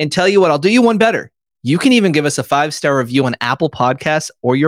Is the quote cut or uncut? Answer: uncut